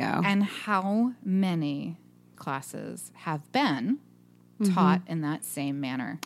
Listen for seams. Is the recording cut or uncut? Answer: cut